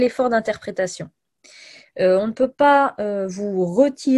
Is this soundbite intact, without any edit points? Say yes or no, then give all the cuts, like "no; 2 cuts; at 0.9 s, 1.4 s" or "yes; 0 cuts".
yes; 0 cuts